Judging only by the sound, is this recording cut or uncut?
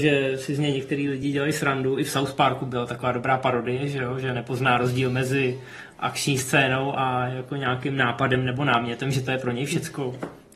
uncut